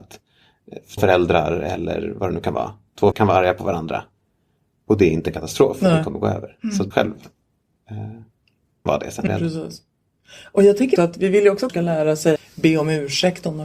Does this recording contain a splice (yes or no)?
yes